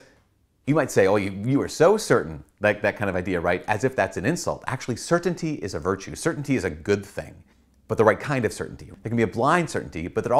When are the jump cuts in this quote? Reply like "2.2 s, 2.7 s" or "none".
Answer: 7.5 s